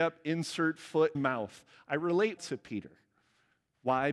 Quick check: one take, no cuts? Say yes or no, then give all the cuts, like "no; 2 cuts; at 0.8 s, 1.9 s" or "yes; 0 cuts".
no; 2 cuts; at 1.1 s, 2.4 s